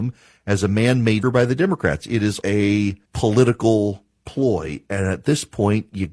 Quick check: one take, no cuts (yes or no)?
no